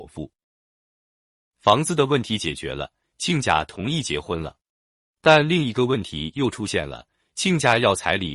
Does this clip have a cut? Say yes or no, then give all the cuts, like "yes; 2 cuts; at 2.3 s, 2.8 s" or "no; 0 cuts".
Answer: no; 0 cuts